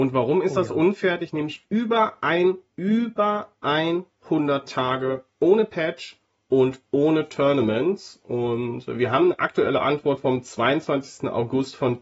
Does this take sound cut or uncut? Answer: uncut